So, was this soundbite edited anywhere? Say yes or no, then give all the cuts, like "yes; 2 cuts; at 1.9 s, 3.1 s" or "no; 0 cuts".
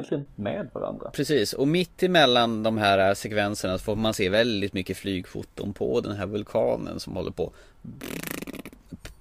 no; 0 cuts